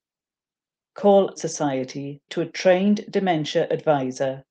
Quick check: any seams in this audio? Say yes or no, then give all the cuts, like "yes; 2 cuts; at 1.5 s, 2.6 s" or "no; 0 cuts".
yes; 2 cuts; at 1.4 s, 2.3 s